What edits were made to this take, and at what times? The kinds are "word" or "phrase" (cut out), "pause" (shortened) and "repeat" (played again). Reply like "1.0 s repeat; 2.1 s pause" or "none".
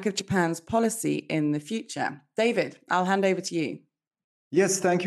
none